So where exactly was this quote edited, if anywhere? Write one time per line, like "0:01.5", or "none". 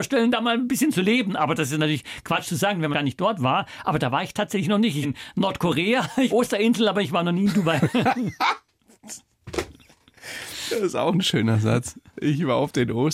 0:02.4
0:02.9
0:05.0
0:06.3